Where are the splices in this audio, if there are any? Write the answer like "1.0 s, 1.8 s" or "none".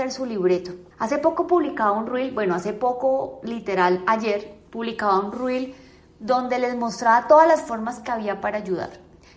0.9 s, 4.7 s